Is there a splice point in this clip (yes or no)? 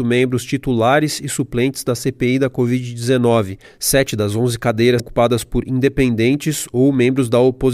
yes